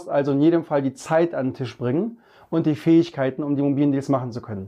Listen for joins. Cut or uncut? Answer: uncut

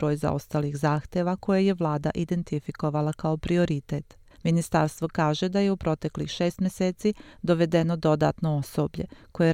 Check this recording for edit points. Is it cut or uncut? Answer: cut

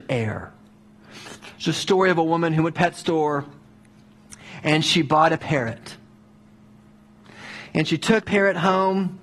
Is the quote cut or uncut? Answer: cut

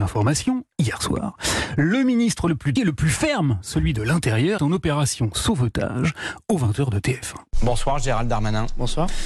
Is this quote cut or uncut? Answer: cut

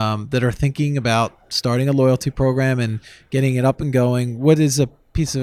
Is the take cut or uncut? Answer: uncut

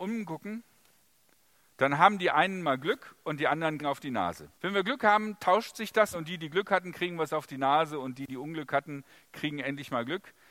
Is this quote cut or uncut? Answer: cut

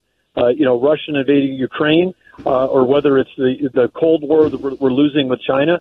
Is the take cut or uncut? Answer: uncut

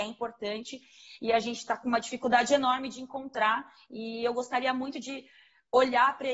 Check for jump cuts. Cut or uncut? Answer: uncut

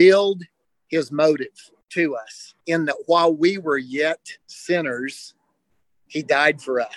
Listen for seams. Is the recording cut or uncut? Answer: cut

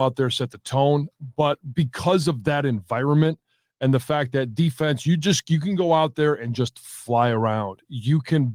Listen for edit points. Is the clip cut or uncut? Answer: uncut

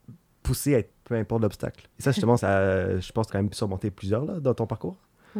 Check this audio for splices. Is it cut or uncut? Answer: cut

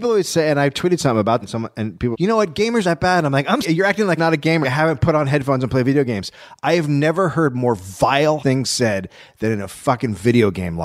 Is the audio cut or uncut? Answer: cut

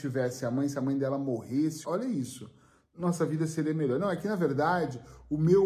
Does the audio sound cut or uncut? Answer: cut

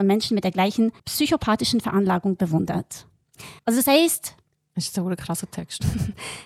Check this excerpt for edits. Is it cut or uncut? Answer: cut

